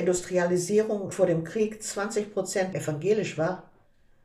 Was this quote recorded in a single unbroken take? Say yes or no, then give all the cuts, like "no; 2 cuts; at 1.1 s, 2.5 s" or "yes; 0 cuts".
no; 2 cuts; at 1.1 s, 2.7 s